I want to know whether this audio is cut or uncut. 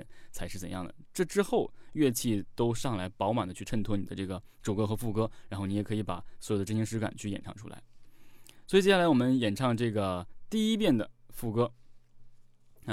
cut